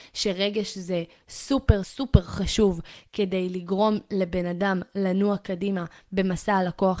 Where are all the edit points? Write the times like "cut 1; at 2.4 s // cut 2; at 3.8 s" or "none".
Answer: cut 1; at 1.8 s